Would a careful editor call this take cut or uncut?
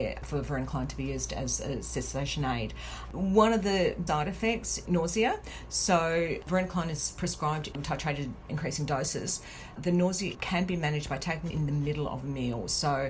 cut